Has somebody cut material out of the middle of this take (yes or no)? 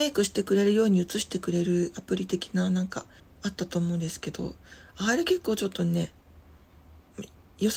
yes